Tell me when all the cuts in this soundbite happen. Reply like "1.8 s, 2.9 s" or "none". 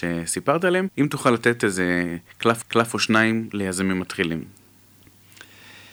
0.9 s, 2.6 s

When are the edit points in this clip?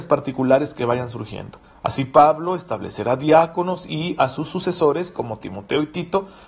1.6 s

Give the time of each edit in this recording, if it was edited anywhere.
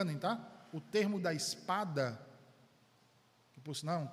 1.2 s

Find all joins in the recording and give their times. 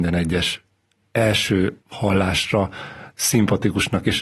1.8 s

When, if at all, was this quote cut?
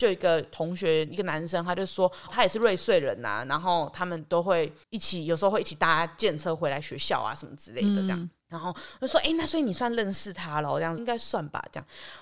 2.3 s, 4.8 s, 8.4 s, 11.0 s

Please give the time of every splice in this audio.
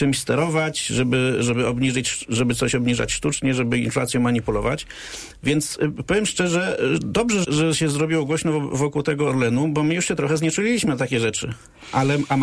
7.4 s

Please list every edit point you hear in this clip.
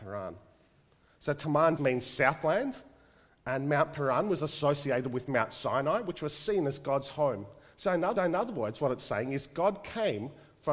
1.8 s, 8.2 s

